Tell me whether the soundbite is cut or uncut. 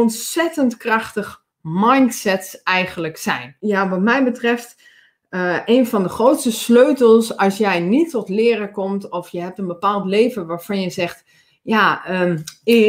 uncut